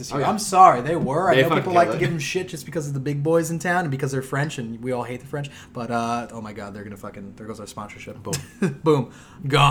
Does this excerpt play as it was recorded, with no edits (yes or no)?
yes